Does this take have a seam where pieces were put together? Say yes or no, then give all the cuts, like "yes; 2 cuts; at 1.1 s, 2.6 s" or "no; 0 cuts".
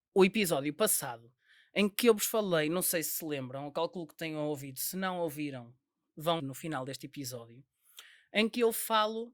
yes; 1 cut; at 6.4 s